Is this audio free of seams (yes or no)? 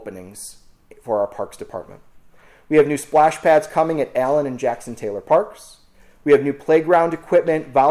yes